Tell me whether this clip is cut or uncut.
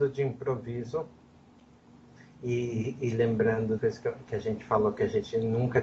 cut